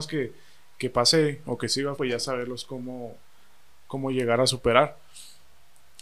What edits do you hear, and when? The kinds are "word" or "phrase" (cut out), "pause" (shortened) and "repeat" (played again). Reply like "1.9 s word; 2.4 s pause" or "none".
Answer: 1.9 s word